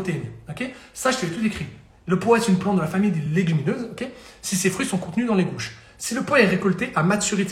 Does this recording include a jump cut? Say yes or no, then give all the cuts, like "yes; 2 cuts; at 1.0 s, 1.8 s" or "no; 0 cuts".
no; 0 cuts